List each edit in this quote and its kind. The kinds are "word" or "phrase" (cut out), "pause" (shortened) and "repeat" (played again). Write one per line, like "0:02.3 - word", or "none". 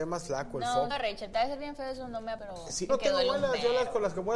0:00.9 - word
0:01.3 - word
0:02.4 - word
0:02.9 - word